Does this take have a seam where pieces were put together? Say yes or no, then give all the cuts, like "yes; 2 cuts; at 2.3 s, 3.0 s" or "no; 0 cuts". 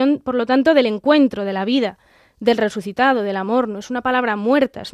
no; 0 cuts